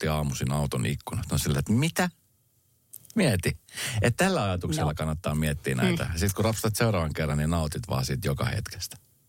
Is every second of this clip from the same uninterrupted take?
yes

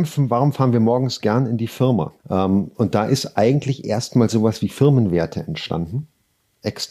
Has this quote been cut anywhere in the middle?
yes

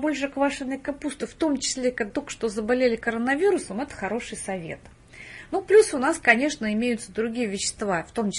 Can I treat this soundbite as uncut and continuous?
no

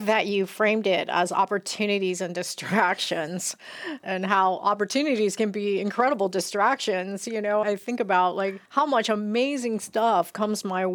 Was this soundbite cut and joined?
yes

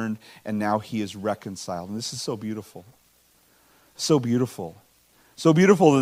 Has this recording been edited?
no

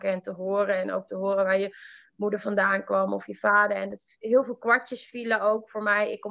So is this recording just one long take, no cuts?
yes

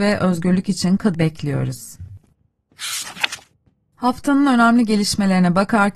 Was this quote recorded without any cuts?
no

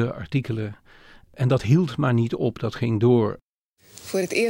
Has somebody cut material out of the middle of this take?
no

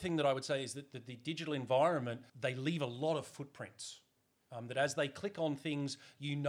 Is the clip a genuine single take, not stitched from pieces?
no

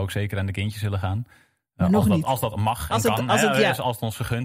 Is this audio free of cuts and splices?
yes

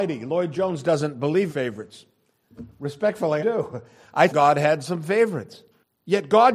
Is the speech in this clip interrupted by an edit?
yes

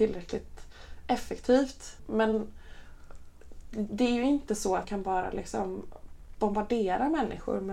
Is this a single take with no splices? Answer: no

